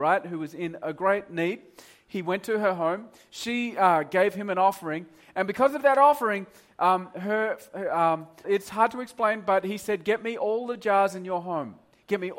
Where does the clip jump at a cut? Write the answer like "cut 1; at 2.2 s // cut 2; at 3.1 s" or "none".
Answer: cut 1; at 8.4 s